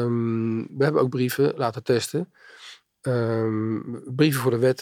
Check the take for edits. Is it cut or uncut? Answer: uncut